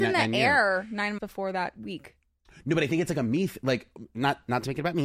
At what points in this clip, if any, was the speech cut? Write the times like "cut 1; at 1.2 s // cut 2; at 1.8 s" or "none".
cut 1; at 1.2 s